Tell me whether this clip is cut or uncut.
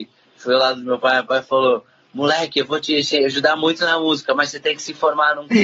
uncut